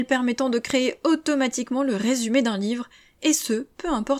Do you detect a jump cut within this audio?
no; 0 cuts

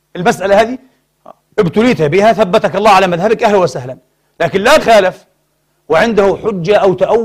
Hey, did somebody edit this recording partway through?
yes; 2 cuts; at 1.5 s, 4.8 s

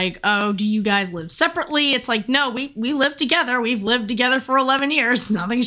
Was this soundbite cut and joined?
no; 0 cuts

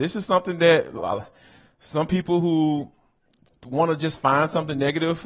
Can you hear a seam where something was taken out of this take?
no; 0 cuts

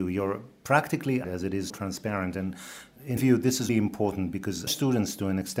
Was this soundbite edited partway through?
yes; 5 cuts; at 1.2 s, 1.7 s, 3.2 s, 3.7 s, 4.7 s

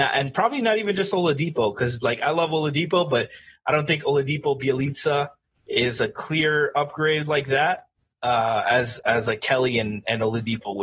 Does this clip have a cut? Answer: no; 0 cuts

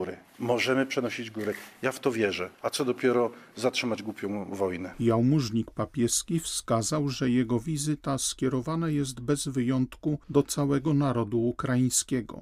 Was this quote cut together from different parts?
yes; 1 cut; at 2.5 s

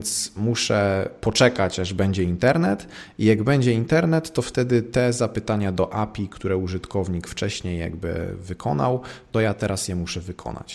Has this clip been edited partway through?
no; 0 cuts

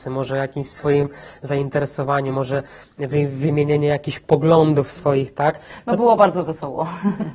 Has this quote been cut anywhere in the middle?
no; 0 cuts

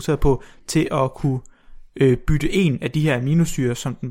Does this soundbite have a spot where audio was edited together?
no; 0 cuts

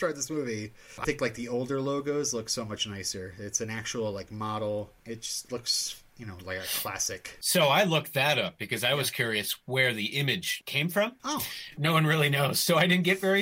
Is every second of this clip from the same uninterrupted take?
no; 1 cut; at 1.0 s

